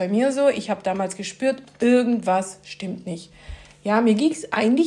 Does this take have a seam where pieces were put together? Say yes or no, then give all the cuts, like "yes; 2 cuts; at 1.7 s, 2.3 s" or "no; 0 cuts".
no; 0 cuts